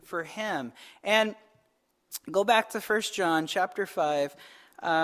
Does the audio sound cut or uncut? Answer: uncut